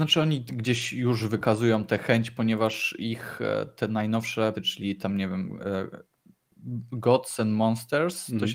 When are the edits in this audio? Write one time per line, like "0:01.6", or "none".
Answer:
0:04.5